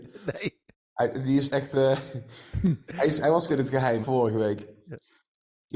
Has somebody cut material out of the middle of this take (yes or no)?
yes